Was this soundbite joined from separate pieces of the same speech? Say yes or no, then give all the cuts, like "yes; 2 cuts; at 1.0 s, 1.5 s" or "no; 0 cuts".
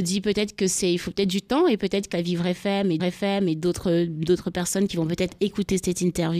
yes; 2 cuts; at 2.1 s, 3.0 s